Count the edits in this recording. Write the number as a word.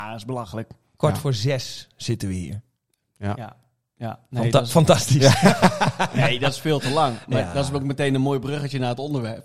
zero